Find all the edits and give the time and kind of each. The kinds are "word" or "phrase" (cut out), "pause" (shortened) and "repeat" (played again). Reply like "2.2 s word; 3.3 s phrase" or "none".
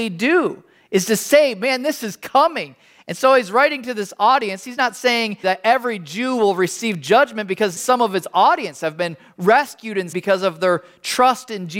5.4 s word; 7.8 s word; 10.1 s word